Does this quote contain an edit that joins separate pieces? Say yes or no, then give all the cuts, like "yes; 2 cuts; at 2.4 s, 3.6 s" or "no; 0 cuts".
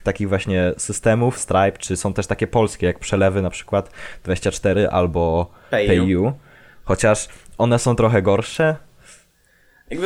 yes; 1 cut; at 1.4 s